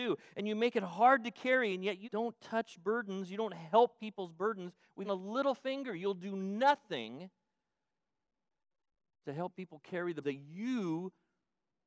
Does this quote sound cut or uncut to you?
cut